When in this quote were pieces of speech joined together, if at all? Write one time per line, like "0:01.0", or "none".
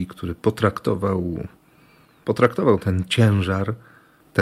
none